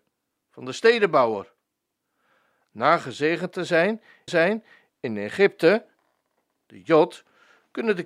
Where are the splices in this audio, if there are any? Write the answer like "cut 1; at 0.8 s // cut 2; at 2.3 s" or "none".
cut 1; at 4.3 s